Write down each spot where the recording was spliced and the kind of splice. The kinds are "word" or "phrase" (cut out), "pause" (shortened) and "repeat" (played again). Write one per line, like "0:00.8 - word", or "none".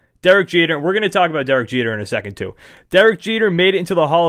none